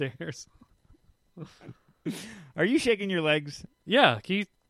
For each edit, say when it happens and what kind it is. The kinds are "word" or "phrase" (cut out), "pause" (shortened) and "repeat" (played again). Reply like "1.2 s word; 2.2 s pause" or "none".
3.7 s pause